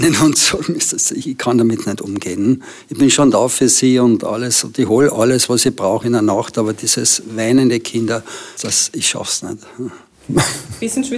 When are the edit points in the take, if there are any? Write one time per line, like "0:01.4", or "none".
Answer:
0:06.0
0:08.6